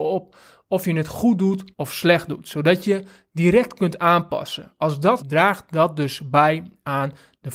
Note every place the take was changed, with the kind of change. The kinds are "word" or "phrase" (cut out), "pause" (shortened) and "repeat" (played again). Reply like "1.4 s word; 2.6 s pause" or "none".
1.7 s pause; 5.2 s phrase